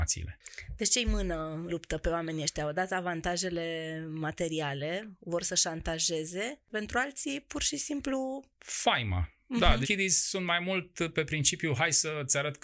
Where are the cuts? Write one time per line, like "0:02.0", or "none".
0:01.7
0:06.7
0:09.8